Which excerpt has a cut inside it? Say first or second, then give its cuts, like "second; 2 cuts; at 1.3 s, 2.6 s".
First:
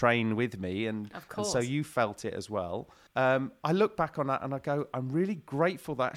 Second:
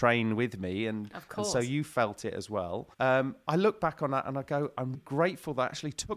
second; 2 cuts; at 2.9 s, 4.9 s